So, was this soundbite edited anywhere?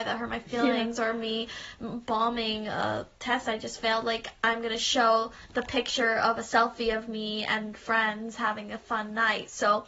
no; 0 cuts

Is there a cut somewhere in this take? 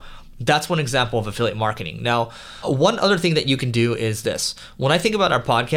no; 0 cuts

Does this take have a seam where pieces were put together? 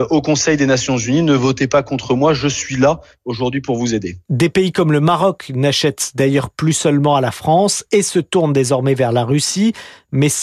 no; 0 cuts

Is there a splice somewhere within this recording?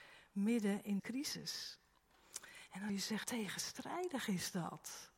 yes; 3 cuts; at 1.0 s, 2.9 s, 3.2 s

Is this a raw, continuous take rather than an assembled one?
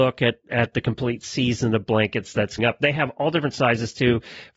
no; 1 cut; at 2.6 s

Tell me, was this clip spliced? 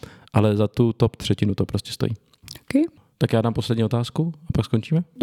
no; 0 cuts

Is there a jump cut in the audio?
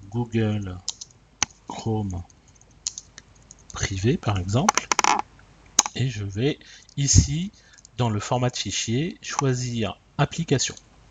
no; 0 cuts

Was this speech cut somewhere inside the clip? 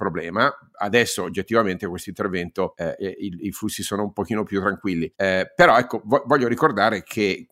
no; 0 cuts

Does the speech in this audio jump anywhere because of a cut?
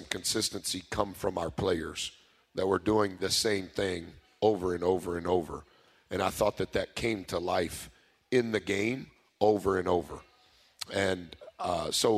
no; 0 cuts

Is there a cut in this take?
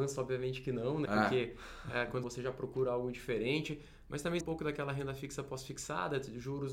yes; 3 cuts; at 1.1 s, 2.2 s, 4.4 s

